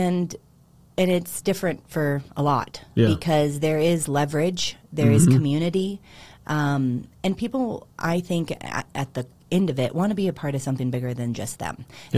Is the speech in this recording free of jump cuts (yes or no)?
yes